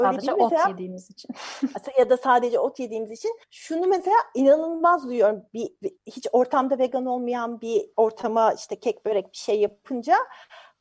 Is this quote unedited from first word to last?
no; 3 cuts; at 3.4 s, 6.0 s, 7.9 s

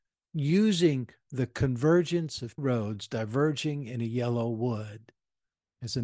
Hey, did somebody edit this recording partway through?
yes; 1 cut; at 2.6 s

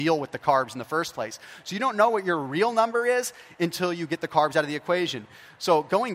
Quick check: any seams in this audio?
no; 0 cuts

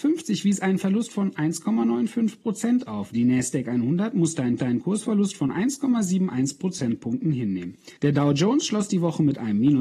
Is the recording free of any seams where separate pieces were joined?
no; 2 cuts; at 4.6 s, 8.0 s

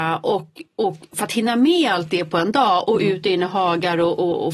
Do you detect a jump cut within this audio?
no; 0 cuts

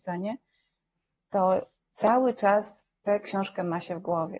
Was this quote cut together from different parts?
yes; 1 cut; at 1.8 s

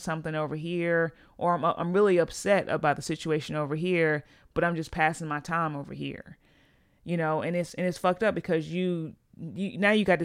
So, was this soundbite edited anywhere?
no; 0 cuts

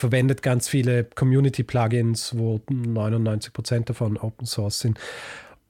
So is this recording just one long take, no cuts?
yes; 0 cuts

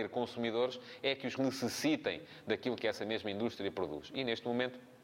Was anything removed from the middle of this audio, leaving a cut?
yes; 1 cut; at 1.4 s

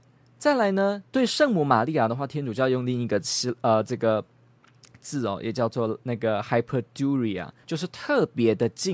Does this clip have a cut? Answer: yes; 1 cut; at 7.6 s

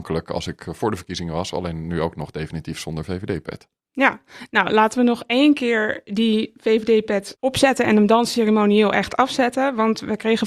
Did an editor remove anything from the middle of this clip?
no; 0 cuts

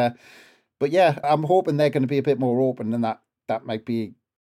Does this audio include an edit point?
yes; 1 cut; at 1.2 s

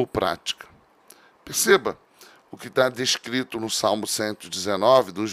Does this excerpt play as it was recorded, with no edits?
yes; 0 cuts

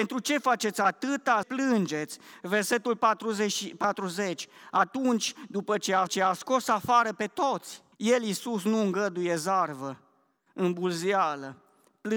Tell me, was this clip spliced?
yes; 3 cuts; at 1.4 s, 6.1 s, 7.9 s

